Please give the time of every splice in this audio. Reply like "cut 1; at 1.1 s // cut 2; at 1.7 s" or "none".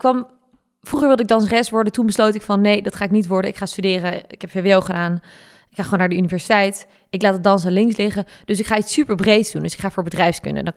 none